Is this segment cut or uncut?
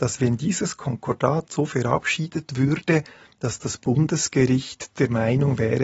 uncut